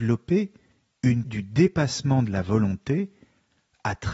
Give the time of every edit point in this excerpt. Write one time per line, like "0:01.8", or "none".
0:01.2